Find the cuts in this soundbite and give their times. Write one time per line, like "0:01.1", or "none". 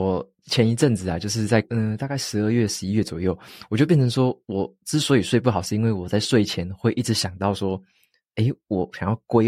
none